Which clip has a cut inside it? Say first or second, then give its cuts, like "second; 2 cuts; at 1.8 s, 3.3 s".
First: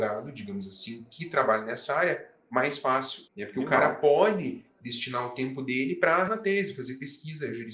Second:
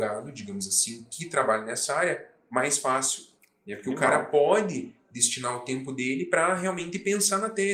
first; 2 cuts; at 3.3 s, 6.3 s